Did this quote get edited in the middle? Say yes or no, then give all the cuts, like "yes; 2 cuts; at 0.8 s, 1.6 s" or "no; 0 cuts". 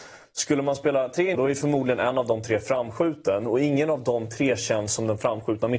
yes; 1 cut; at 1.3 s